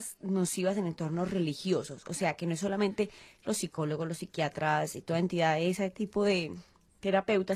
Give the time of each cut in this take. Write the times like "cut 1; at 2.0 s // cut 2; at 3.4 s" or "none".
none